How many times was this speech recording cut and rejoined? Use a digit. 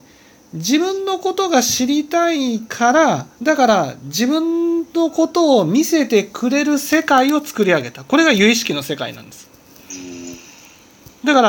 1